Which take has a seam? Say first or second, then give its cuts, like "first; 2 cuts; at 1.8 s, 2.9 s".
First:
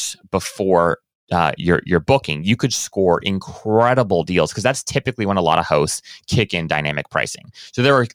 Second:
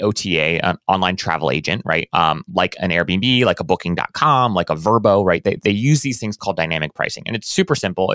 second; 1 cut; at 5.6 s